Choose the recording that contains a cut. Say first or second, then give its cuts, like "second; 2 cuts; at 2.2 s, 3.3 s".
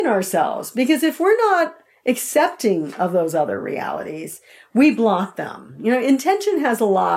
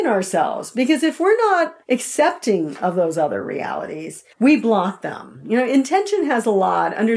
second; 2 cuts; at 1.8 s, 4.3 s